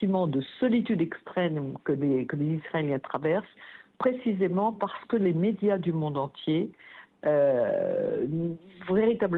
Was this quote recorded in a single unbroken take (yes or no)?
yes